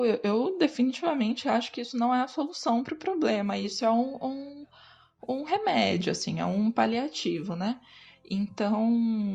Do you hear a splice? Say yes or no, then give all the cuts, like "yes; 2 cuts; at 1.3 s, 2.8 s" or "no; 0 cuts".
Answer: no; 0 cuts